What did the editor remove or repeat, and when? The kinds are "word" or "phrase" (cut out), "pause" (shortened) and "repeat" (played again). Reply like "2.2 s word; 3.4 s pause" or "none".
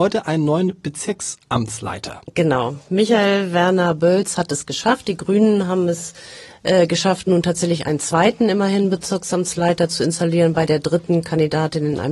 none